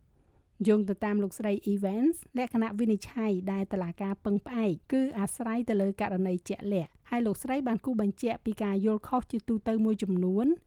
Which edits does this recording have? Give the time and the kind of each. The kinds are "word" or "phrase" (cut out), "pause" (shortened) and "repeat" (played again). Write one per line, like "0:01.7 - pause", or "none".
0:02.3 - pause
0:04.8 - pause
0:07.0 - pause